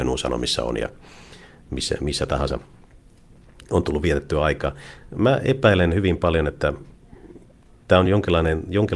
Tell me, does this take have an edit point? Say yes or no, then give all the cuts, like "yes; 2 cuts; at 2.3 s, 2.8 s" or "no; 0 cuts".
no; 0 cuts